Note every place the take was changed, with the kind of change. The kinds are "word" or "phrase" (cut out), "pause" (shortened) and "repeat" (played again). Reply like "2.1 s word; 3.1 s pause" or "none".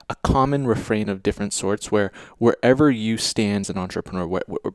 3.6 s word